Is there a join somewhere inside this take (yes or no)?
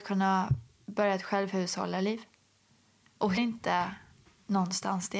yes